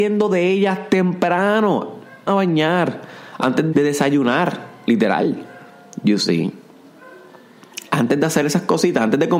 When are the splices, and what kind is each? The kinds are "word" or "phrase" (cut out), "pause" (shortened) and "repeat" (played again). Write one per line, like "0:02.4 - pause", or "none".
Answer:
0:02.3 - phrase
0:03.7 - word